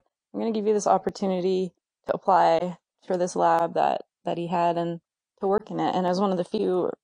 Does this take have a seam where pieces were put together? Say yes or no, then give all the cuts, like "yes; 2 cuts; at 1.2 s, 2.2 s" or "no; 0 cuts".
no; 0 cuts